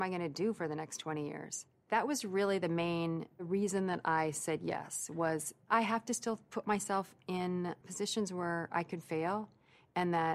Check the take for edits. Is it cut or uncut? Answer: cut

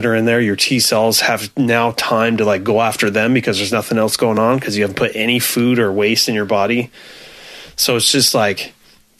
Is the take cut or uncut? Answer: uncut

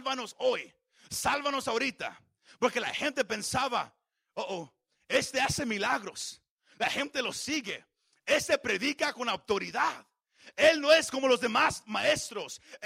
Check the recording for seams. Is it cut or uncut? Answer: uncut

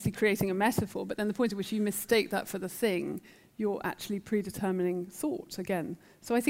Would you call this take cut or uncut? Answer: uncut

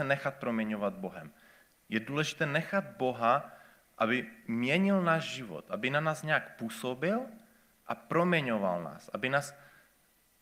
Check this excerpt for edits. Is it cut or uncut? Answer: uncut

